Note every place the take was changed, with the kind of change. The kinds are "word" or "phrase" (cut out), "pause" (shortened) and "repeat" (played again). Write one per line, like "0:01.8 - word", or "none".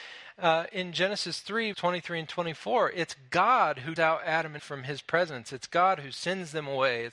0:01.7 - word
0:04.0 - word
0:04.6 - word